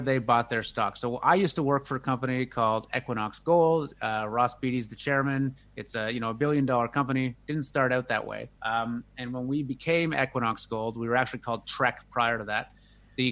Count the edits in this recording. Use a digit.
1